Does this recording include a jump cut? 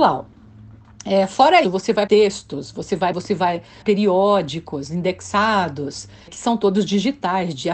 yes; 5 cuts; at 1.6 s, 2.1 s, 3.1 s, 3.8 s, 6.3 s

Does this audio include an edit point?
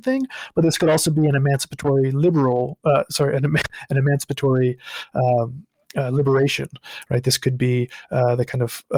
no; 0 cuts

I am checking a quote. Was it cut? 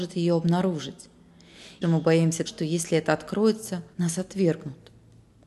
yes; 3 cuts; at 1.8 s, 2.5 s, 3.9 s

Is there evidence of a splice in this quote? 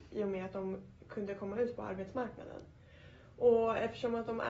no; 0 cuts

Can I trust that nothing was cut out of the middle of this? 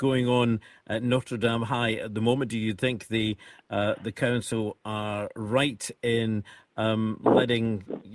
yes; 0 cuts

